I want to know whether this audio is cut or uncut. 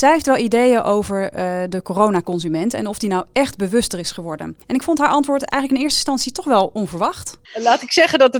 cut